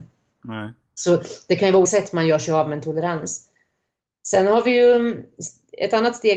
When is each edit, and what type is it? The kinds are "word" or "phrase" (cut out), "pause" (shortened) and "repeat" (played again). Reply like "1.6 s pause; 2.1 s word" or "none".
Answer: 1.9 s word